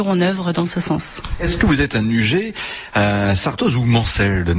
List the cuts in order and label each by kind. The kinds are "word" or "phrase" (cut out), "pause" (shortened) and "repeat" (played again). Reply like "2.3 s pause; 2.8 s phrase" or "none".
none